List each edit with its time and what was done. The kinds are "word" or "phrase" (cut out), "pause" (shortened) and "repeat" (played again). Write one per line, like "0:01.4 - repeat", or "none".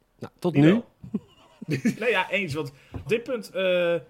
0:01.9 - word
0:03.1 - word